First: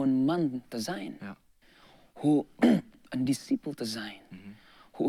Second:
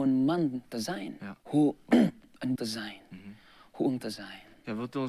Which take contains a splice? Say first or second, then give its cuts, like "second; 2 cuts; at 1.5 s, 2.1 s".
second; 3 cuts; at 1.4 s, 2.6 s, 4.0 s